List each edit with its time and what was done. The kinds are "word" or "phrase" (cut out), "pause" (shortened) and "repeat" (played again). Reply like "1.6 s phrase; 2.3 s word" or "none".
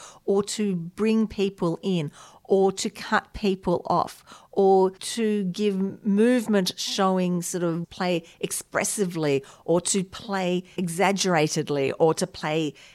none

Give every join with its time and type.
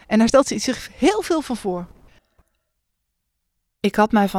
none

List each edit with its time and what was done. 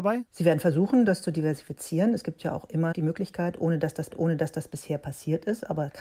2.9 s word; 4.1 s repeat

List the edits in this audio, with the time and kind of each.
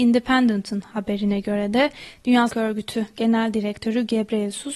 2.5 s word

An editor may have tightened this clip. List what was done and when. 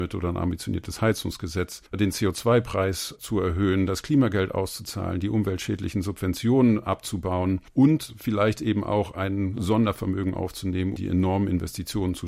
1.9 s pause; 7.7 s pause; 11.0 s word

